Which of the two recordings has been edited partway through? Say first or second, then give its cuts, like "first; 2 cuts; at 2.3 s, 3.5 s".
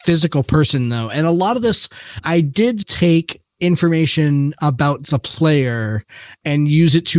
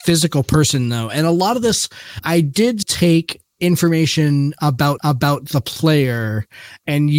second; 1 cut; at 5.0 s